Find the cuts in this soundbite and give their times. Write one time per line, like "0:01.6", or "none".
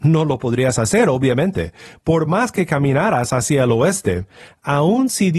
none